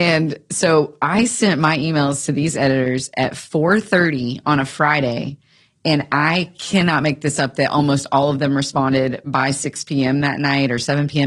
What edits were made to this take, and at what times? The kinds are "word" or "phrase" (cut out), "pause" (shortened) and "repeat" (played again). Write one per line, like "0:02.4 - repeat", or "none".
none